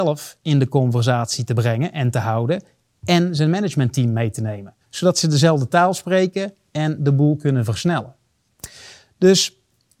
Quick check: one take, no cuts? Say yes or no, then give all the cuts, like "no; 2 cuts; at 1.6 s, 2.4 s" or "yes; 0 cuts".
no; 1 cut; at 4.8 s